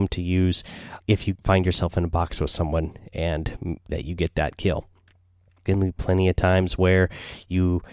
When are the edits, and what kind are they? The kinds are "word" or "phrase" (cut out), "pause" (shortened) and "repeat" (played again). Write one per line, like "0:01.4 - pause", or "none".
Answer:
0:01.0 - word
0:01.4 - word
0:03.9 - word
0:05.7 - word